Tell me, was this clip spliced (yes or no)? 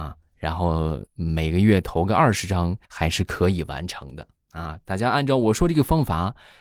yes